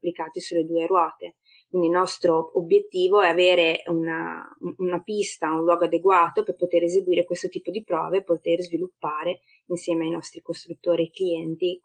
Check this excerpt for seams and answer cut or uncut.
uncut